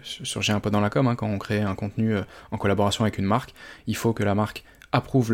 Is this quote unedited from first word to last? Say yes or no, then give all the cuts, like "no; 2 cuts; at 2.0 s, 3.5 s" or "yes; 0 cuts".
yes; 0 cuts